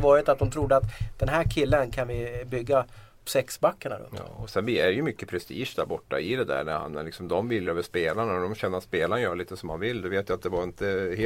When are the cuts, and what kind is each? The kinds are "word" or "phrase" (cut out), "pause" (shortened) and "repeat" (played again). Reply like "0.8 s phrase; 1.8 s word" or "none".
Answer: 3.2 s word; 7.6 s phrase